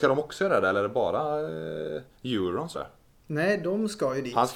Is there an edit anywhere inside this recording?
yes; 2 cuts; at 2.1 s, 2.7 s

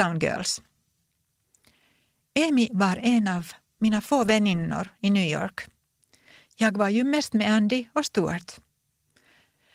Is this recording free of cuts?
yes; 0 cuts

